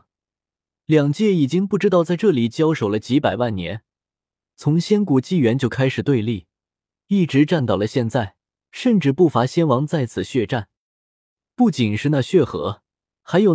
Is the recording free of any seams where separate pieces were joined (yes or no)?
yes